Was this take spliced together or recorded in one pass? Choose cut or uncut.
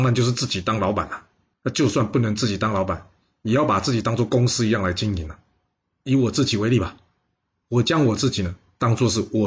cut